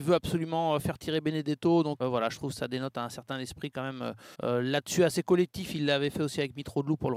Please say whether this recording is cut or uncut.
cut